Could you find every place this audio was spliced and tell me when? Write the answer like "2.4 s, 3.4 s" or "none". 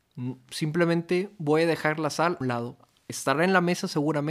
2.4 s